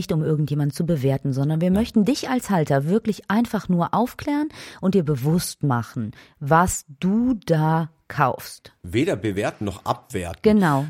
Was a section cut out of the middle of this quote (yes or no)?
no